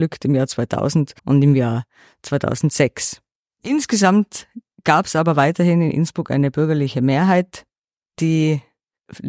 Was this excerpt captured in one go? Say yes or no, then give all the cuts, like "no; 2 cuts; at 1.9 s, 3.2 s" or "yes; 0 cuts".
no; 2 cuts; at 1.2 s, 3.4 s